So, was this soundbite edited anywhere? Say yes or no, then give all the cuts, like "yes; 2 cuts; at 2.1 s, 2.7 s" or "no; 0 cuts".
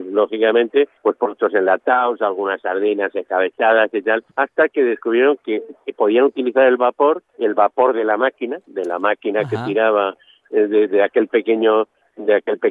yes; 3 cuts; at 1.0 s, 4.3 s, 7.3 s